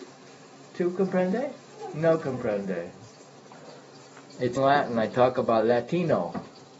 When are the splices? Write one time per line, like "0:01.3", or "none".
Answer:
0:04.6